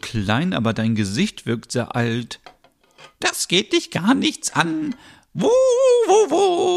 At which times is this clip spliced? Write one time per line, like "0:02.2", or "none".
none